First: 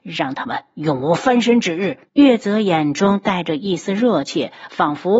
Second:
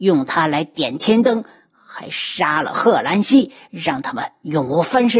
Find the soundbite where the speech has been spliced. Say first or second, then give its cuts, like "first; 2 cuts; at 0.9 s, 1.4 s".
first; 1 cut; at 2.1 s